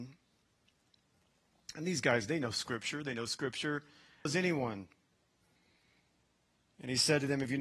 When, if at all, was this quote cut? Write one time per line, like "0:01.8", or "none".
0:04.3

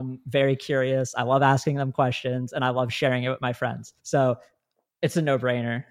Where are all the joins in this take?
0:04.0

